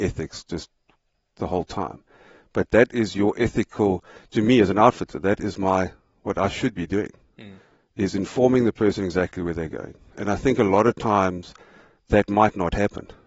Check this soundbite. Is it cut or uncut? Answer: uncut